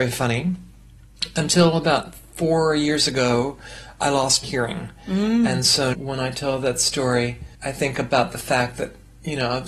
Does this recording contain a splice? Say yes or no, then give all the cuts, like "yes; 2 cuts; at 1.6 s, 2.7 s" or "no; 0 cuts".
yes; 3 cuts; at 4.4 s, 5.9 s, 7.5 s